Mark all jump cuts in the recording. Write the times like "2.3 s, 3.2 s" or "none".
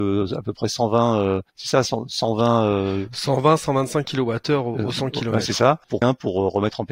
1.5 s, 6.0 s